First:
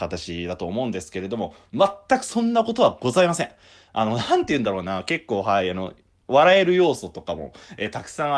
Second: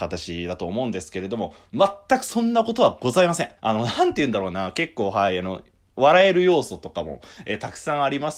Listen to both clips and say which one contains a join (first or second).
second